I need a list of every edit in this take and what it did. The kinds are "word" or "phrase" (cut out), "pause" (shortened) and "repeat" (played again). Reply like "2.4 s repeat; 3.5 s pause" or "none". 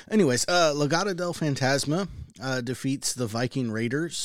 none